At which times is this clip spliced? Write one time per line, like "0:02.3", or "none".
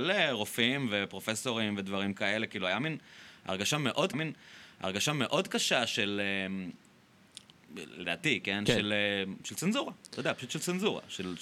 0:04.1